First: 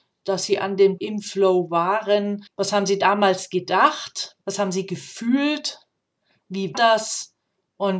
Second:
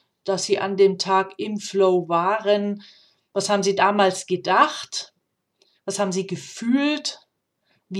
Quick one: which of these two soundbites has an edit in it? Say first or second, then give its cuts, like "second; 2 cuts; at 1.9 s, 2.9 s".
first; 4 cuts; at 1.0 s, 2.5 s, 4.4 s, 6.7 s